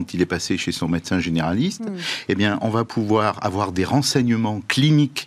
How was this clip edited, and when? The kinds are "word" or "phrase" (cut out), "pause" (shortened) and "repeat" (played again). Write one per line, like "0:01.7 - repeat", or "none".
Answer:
none